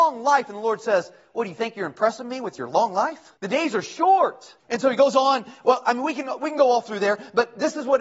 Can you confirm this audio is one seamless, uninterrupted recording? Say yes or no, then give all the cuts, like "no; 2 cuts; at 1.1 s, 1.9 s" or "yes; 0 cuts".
no; 2 cuts; at 3.4 s, 4.6 s